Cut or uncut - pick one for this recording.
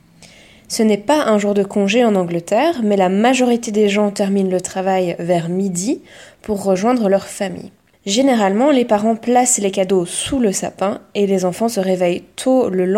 uncut